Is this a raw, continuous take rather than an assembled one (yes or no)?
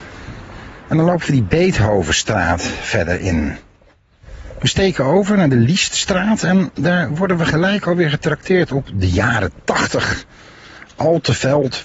yes